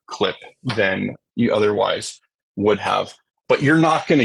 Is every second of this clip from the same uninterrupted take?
yes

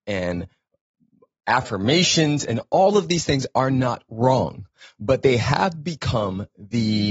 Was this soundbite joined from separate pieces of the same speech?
no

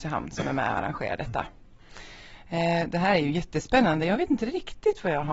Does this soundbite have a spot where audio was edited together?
no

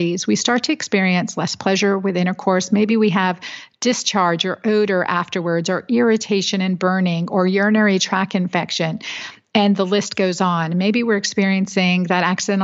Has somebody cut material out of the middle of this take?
no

